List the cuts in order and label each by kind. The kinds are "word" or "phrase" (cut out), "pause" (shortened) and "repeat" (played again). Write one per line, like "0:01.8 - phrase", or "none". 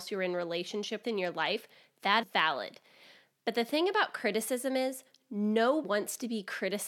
0:01.0 - word
0:02.2 - word
0:05.8 - word